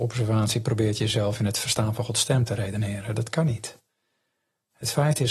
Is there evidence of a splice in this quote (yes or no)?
no